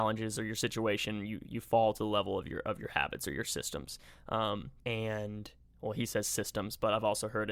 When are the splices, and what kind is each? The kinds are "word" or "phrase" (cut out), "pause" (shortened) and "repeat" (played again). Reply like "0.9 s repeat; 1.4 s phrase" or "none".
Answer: 4.8 s pause